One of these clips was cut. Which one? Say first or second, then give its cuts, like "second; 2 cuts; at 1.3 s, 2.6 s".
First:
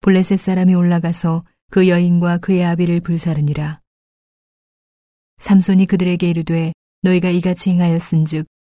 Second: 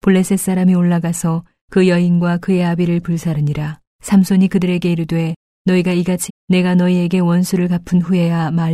second; 2 cuts; at 3.9 s, 6.3 s